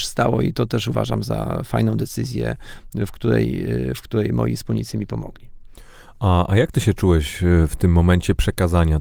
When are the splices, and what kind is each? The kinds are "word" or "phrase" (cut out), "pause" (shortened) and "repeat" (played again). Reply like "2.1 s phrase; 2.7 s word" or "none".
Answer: none